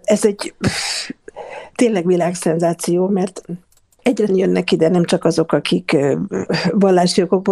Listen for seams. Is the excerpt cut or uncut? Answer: cut